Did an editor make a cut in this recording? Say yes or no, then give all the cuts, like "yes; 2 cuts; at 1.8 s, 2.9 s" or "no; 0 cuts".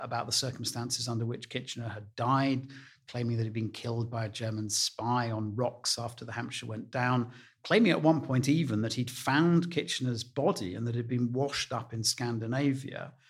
no; 0 cuts